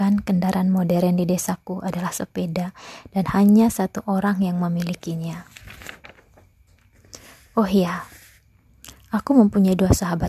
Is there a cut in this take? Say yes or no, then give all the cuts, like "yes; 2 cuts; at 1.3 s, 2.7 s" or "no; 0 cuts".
no; 0 cuts